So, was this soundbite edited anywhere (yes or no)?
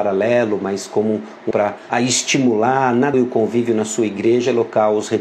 yes